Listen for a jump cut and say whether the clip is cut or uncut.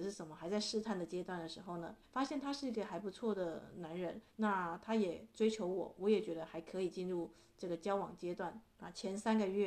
cut